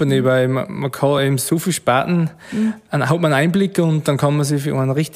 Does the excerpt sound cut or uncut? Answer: uncut